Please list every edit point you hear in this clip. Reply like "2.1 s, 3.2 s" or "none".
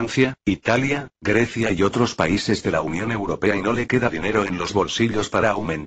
none